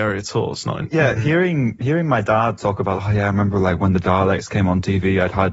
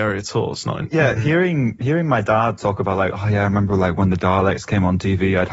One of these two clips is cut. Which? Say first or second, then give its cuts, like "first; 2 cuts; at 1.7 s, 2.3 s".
first; 1 cut; at 3.0 s